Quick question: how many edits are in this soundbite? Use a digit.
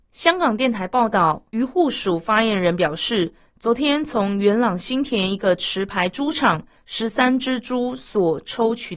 1